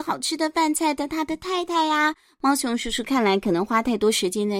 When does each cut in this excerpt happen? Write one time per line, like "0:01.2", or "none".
none